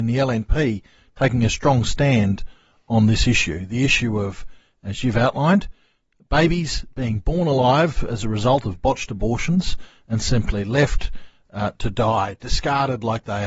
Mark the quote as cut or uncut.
uncut